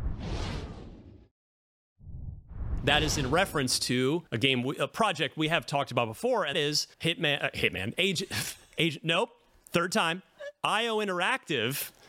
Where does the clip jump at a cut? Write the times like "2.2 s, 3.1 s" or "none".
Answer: 4.3 s, 6.5 s, 6.9 s